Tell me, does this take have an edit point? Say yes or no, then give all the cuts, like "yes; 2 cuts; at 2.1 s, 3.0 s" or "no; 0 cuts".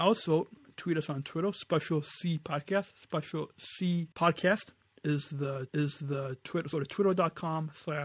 yes; 3 cuts; at 4.1 s, 5.7 s, 6.7 s